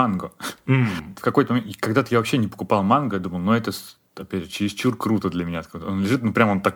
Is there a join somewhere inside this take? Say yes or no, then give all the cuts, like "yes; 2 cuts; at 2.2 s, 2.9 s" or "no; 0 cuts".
no; 0 cuts